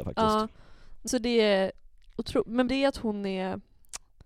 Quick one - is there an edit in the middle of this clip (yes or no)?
yes